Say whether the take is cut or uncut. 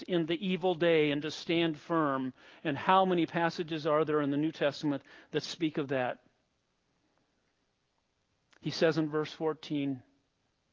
uncut